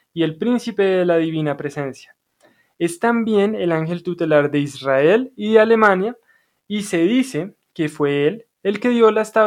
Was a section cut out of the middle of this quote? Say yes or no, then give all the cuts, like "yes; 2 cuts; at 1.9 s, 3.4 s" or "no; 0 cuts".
no; 0 cuts